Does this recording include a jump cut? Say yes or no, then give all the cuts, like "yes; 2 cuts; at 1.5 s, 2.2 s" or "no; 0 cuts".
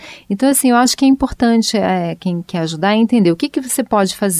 no; 0 cuts